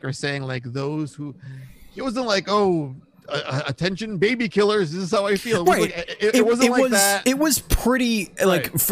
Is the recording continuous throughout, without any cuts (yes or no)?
yes